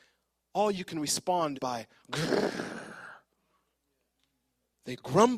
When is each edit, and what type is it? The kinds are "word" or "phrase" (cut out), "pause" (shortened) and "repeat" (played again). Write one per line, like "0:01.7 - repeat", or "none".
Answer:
0:01.5 - word